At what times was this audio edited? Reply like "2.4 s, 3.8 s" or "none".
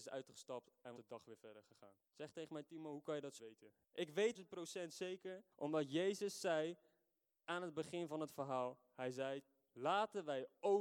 1.0 s, 2.1 s, 3.4 s, 3.8 s, 4.3 s, 5.5 s